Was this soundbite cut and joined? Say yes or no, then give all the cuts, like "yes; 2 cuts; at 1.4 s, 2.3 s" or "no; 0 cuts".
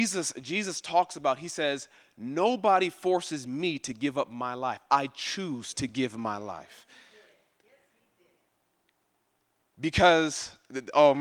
no; 0 cuts